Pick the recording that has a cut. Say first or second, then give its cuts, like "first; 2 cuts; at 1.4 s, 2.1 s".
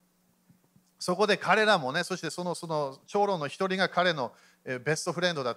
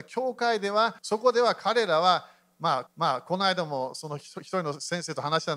second; 2 cuts; at 1.0 s, 2.9 s